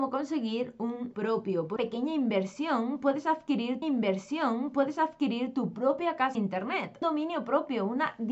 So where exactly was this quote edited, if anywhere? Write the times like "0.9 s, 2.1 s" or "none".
1.1 s, 1.8 s, 3.8 s, 6.4 s, 7.0 s

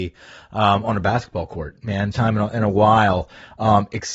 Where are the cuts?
2.1 s

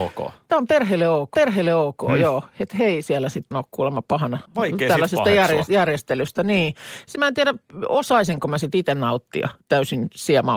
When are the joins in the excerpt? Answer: 1.3 s, 3.5 s, 4.5 s, 7.1 s, 9.6 s

